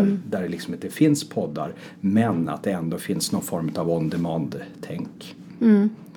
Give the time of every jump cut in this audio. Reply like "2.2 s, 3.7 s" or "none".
none